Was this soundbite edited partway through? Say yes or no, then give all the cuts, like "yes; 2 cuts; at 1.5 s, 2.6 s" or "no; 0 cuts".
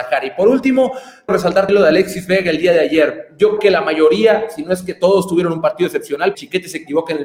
yes; 4 cuts; at 1.3 s, 1.7 s, 3.6 s, 6.3 s